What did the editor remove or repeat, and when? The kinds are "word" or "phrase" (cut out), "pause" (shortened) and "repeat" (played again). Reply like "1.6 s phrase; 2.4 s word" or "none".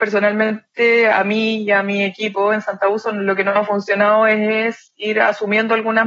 none